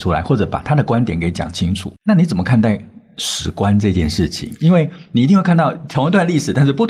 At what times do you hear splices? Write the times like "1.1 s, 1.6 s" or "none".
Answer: 2.0 s